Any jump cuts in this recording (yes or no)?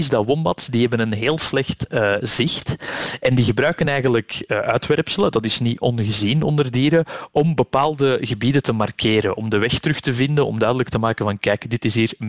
no